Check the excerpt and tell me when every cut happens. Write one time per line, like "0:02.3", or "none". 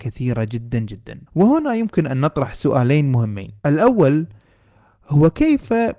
0:01.3
0:03.6